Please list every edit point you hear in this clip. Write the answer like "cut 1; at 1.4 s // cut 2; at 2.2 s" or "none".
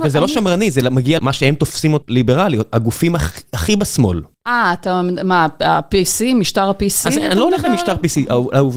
cut 1; at 1.2 s // cut 2; at 2.0 s // cut 3; at 4.3 s